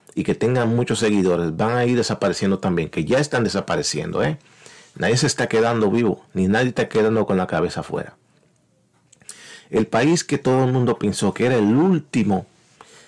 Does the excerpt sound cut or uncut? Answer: uncut